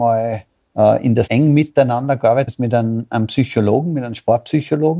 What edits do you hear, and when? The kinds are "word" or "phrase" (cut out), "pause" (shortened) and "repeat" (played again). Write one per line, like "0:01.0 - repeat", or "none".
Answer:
0:01.3 - word
0:02.5 - word